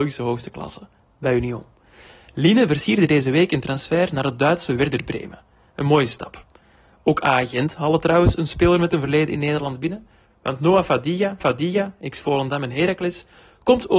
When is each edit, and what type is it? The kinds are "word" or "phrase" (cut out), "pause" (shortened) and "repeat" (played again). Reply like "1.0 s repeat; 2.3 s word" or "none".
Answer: 11.4 s repeat